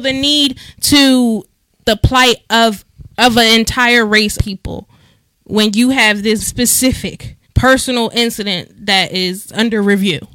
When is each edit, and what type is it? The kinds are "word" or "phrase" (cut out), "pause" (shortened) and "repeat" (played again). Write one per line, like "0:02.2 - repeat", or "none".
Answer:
0:01.8 - phrase
0:03.1 - phrase
0:04.4 - word
0:06.4 - word
0:07.4 - pause